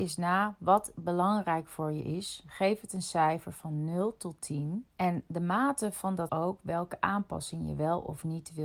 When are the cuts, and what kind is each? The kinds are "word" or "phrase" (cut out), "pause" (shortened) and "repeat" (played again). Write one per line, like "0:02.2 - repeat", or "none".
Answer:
0:04.9 - pause
0:06.3 - phrase